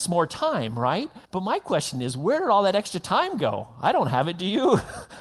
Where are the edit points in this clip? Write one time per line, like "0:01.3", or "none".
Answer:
0:01.2